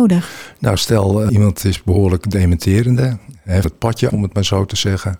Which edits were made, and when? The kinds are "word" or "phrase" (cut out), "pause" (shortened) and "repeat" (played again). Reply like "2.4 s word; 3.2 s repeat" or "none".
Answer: 1.3 s word; 3.6 s word; 4.1 s word